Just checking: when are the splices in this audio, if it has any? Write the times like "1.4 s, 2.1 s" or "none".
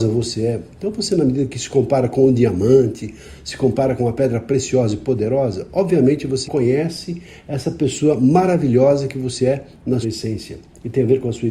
6.5 s, 10.0 s